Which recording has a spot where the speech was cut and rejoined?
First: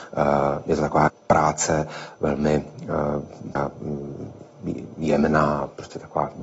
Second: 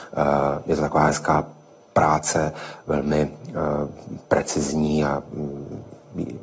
first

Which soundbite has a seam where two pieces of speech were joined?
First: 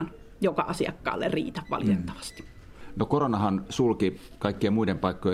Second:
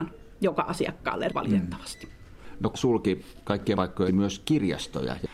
second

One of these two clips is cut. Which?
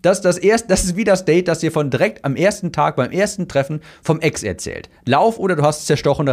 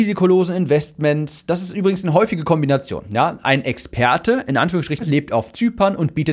second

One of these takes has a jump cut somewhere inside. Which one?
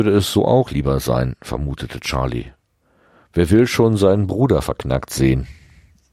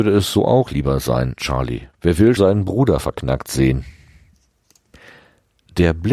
second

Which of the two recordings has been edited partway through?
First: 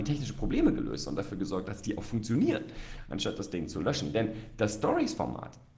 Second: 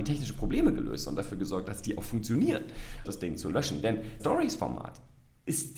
second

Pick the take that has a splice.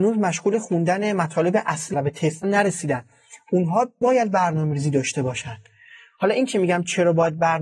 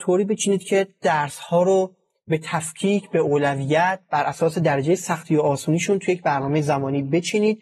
first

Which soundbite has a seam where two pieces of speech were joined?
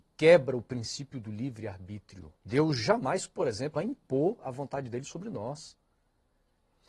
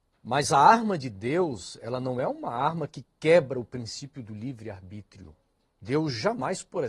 first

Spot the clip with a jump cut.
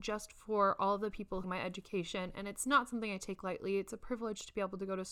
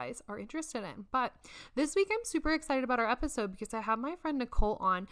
first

